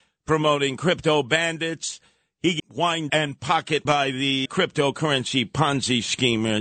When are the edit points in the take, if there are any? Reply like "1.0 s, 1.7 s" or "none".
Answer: 2.6 s, 3.1 s, 3.8 s, 4.4 s